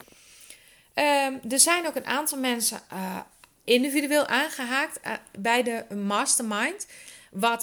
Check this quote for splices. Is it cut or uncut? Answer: uncut